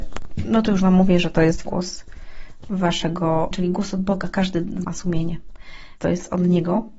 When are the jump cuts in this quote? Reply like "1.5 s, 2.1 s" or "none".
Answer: 1.6 s, 3.5 s, 4.8 s, 6.0 s